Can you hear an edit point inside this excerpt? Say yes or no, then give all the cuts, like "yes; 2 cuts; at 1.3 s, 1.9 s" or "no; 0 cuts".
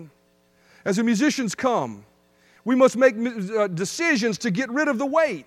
no; 0 cuts